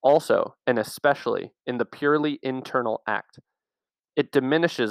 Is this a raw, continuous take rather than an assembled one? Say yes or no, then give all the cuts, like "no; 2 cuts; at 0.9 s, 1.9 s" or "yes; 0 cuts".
yes; 0 cuts